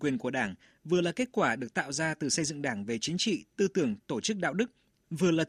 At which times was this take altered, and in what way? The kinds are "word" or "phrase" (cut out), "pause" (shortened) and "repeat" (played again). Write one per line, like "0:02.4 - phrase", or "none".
none